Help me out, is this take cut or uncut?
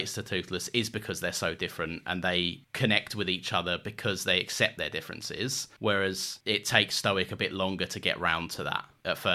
uncut